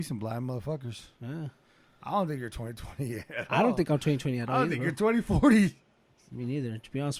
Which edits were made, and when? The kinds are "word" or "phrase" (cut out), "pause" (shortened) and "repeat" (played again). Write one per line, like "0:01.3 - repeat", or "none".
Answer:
none